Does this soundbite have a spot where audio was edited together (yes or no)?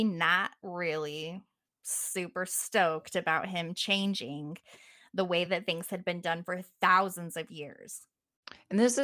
no